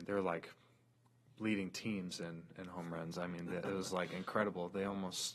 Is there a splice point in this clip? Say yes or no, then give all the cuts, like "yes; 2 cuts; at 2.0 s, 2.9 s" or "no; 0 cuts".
no; 0 cuts